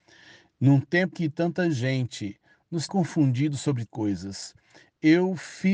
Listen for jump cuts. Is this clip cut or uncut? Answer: cut